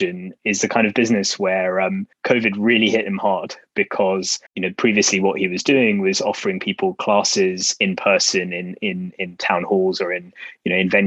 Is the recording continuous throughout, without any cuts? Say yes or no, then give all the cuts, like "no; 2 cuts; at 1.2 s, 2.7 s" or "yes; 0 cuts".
no; 2 cuts; at 2.1 s, 4.5 s